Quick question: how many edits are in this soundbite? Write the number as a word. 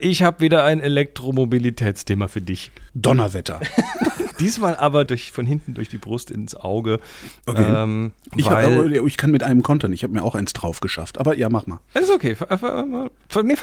four